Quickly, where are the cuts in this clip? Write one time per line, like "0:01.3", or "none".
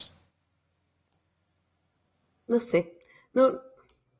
none